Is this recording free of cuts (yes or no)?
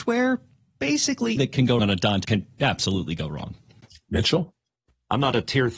no